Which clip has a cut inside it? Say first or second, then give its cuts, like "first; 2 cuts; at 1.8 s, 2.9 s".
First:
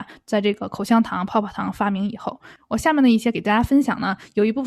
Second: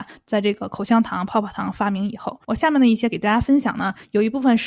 second; 1 cut; at 2.4 s